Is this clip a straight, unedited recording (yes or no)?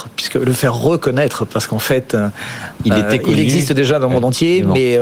yes